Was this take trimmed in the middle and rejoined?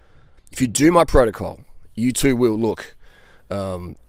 no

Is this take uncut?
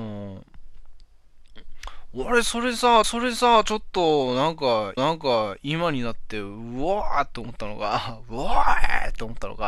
no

